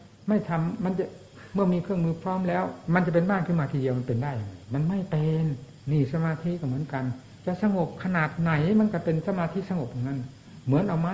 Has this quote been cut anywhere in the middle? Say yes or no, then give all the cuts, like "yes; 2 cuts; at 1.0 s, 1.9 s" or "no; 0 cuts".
yes; 1 cut; at 5.8 s